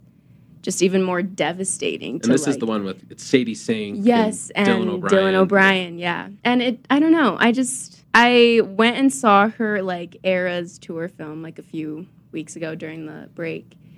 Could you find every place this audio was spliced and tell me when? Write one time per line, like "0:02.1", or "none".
0:03.0
0:06.4
0:08.0